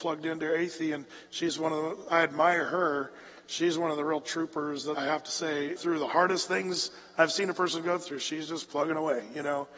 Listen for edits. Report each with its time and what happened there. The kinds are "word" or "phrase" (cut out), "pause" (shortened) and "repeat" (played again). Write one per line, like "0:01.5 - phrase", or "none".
0:04.9 - word
0:05.8 - word